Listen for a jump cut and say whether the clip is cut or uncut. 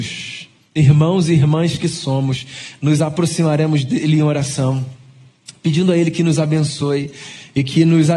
uncut